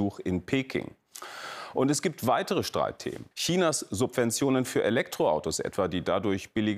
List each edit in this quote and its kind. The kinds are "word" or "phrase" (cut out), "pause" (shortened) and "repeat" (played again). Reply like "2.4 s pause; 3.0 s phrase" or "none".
3.3 s pause